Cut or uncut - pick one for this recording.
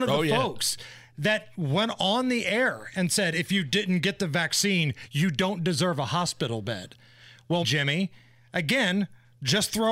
cut